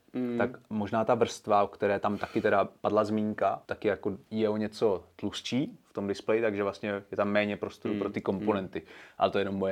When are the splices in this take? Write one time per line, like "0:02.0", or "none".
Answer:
0:03.6
0:04.3